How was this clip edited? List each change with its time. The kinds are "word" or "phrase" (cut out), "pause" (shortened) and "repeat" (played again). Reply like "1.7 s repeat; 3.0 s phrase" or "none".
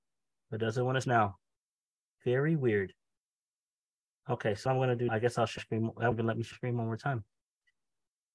1.0 s word; 4.7 s word; 5.1 s word; 5.6 s word; 6.1 s word; 6.5 s word